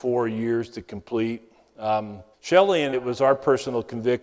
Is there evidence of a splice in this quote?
yes; 2 cuts; at 2.3 s, 2.9 s

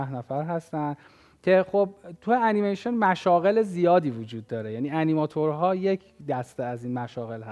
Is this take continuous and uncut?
yes; 0 cuts

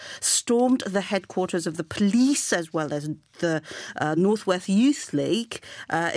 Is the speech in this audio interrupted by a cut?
no; 0 cuts

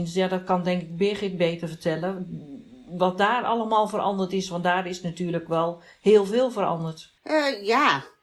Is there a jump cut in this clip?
yes; 1 cut; at 7.2 s

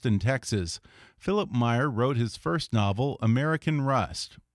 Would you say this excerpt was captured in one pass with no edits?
yes; 0 cuts

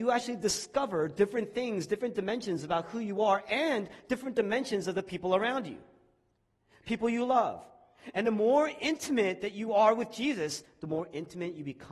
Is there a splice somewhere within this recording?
no; 0 cuts

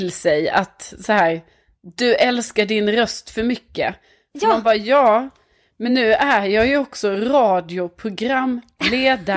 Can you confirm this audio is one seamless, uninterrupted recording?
yes; 0 cuts

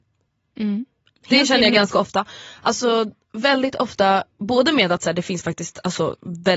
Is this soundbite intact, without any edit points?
yes; 0 cuts

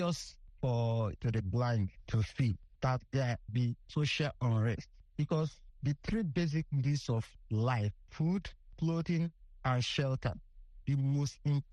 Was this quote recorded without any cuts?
no; 2 cuts; at 1.2 s, 3.5 s

